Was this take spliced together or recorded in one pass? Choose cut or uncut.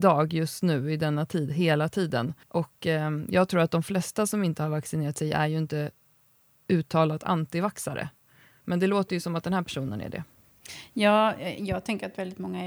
cut